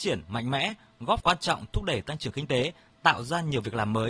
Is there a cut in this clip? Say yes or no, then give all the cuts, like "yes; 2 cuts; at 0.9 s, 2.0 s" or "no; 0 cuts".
yes; 1 cut; at 1.2 s